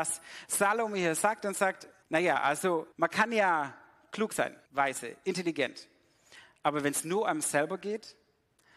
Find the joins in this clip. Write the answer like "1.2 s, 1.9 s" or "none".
2.0 s, 2.9 s, 4.7 s